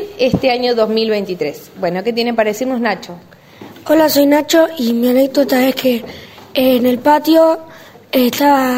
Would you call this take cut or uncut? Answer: uncut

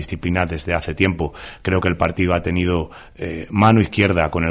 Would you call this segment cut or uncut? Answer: uncut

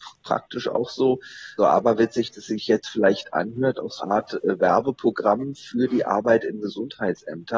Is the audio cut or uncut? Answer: cut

